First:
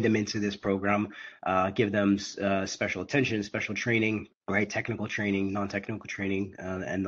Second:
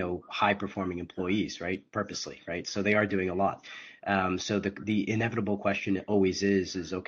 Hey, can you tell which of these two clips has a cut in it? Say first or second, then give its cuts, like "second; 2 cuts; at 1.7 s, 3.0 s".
first; 1 cut; at 4.3 s